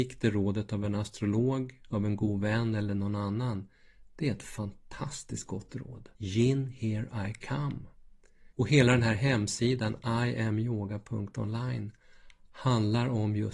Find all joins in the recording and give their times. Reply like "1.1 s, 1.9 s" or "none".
6.2 s, 8.5 s

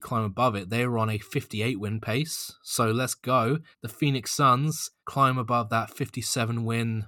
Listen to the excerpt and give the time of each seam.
3.7 s, 5.0 s

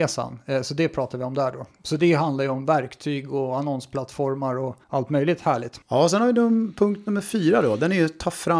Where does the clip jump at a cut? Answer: 4.8 s, 5.8 s

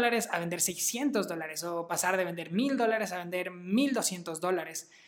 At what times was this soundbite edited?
none

